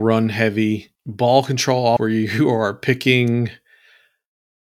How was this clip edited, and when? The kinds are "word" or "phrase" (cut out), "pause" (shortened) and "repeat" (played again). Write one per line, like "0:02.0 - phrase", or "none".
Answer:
0:01.0 - pause
0:02.0 - word